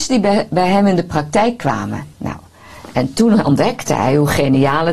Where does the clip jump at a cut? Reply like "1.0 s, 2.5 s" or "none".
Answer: 2.1 s